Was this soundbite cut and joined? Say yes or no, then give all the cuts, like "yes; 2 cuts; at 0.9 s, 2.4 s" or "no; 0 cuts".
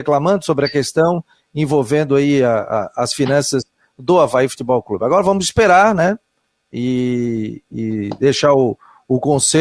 no; 0 cuts